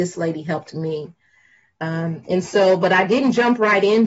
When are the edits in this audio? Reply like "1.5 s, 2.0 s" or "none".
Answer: none